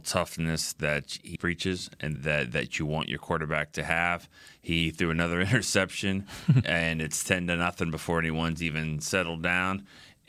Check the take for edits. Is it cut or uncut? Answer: cut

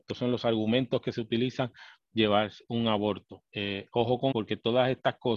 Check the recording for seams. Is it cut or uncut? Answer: cut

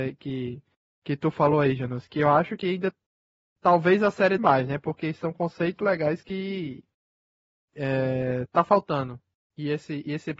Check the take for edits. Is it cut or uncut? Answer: cut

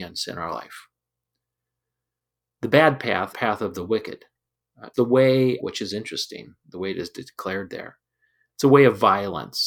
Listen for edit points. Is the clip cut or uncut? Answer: cut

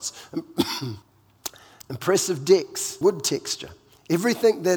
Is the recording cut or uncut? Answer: cut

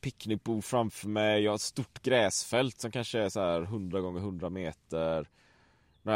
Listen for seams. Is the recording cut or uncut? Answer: uncut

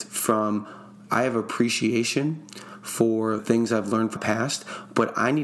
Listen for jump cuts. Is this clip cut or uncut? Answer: cut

